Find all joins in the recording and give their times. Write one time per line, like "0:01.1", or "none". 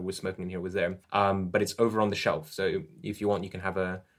0:01.0

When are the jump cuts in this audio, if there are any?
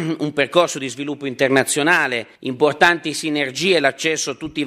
0:02.4

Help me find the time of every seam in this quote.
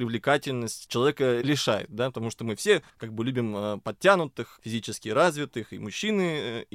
0:02.9

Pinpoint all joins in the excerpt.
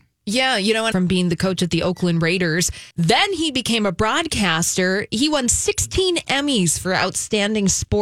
0:00.9
0:02.9

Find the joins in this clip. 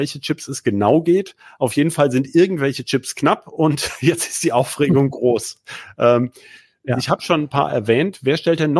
none

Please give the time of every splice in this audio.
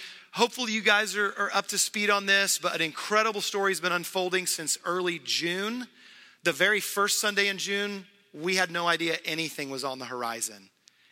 none

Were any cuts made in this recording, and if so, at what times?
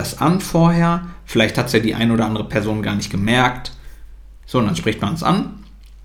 0:04.4

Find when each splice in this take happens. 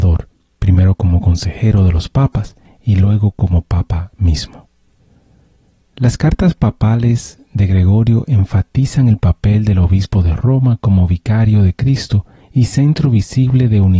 none

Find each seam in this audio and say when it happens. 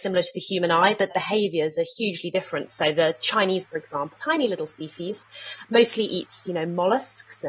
0:01.1
0:03.6
0:04.2

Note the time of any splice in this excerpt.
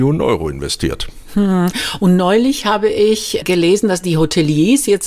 none

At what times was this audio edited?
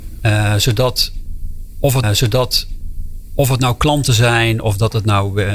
0:02.0

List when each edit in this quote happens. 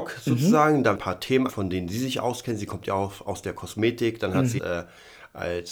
0:00.9
0:01.5
0:04.6

